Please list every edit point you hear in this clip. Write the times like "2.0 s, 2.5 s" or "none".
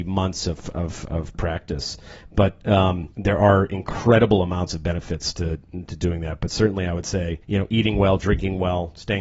3.1 s, 5.9 s, 7.4 s